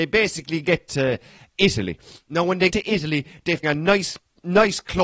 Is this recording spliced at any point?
yes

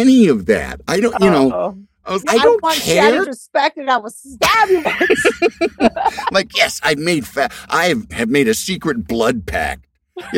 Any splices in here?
yes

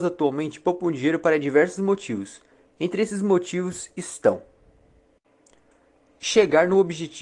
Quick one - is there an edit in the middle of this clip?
no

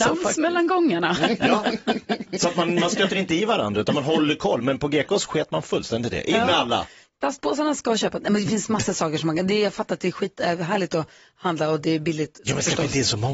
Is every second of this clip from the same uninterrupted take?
yes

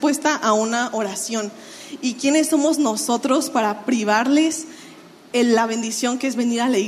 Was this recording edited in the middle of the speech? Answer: no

